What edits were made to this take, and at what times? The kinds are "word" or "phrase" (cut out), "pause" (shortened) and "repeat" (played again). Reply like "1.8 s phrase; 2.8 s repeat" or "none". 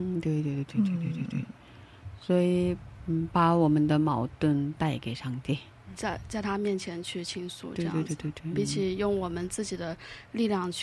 5.9 s word; 8.5 s word